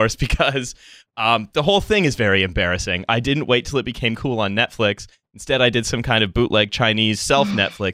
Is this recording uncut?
yes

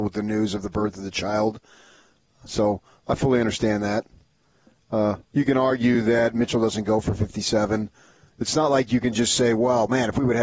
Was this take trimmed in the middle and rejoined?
no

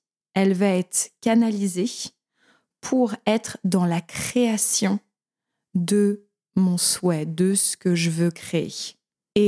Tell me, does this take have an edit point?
no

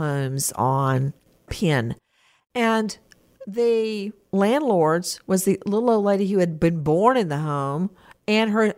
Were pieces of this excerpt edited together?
no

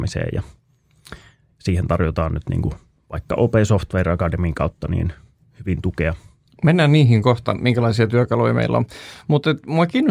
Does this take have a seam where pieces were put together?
no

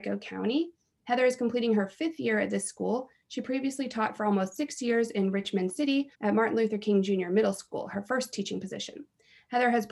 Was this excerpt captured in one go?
no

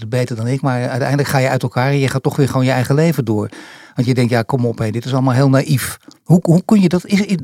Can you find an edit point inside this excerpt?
no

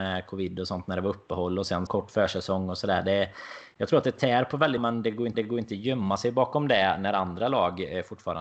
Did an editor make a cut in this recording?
yes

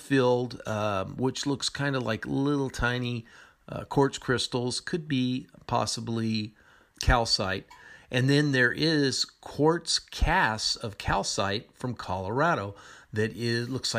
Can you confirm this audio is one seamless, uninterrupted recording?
no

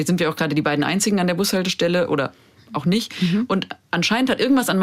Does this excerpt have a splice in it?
no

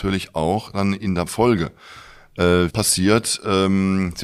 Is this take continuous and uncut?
no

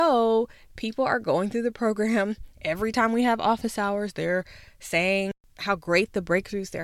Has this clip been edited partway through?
no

